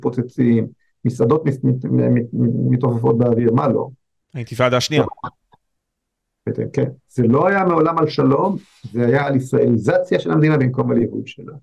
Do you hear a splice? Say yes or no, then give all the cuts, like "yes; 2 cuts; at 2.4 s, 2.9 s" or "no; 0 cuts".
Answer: no; 0 cuts